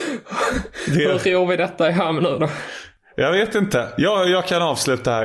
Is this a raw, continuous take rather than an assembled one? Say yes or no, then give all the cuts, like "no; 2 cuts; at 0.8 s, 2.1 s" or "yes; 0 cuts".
yes; 0 cuts